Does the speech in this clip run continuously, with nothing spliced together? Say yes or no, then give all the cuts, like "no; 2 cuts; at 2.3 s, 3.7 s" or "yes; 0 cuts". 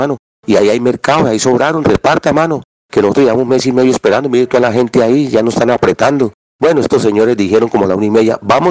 yes; 0 cuts